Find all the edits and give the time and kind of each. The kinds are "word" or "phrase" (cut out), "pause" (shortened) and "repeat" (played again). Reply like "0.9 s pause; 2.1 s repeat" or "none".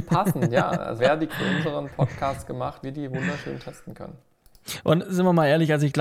1.0 s word; 1.3 s word; 2.8 s word